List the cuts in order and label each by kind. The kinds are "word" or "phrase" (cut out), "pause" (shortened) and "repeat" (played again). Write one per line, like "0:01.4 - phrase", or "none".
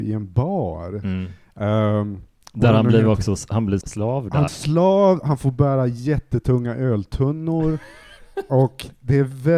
0:03.8 - word
0:04.5 - word